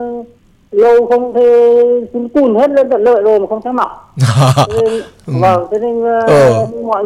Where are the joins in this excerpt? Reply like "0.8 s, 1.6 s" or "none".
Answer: none